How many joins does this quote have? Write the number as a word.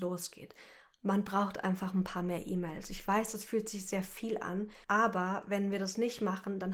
one